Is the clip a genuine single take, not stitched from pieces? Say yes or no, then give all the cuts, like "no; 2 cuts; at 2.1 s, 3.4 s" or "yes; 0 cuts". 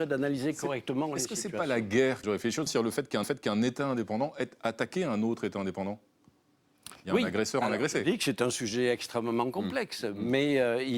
no; 4 cuts; at 2.2 s, 2.7 s, 3.2 s, 7.0 s